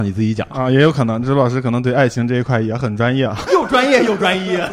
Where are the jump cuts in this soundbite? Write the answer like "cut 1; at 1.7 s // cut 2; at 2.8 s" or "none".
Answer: cut 1; at 3.5 s